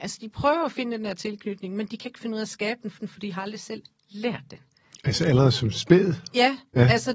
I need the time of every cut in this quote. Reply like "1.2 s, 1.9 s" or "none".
3.0 s